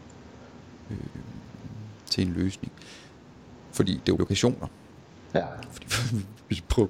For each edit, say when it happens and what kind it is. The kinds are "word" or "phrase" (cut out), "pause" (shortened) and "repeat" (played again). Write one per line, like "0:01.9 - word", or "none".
0:02.0 - pause
0:04.2 - phrase